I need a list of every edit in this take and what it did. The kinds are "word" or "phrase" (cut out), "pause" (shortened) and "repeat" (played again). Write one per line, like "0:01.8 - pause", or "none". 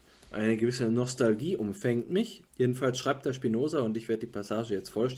0:02.5 - pause